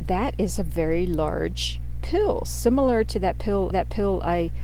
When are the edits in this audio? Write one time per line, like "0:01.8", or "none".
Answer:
0:03.7